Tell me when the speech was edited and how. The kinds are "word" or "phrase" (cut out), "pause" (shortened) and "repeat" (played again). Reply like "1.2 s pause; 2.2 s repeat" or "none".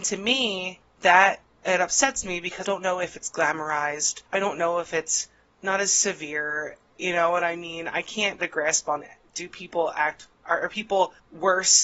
2.6 s word; 4.3 s pause; 8.4 s word